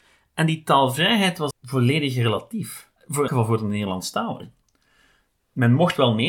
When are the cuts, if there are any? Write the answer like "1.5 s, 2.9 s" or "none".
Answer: 1.5 s, 3.0 s, 3.3 s